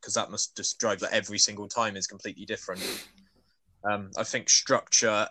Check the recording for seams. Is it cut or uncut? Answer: cut